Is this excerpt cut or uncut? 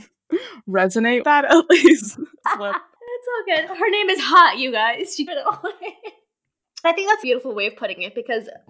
cut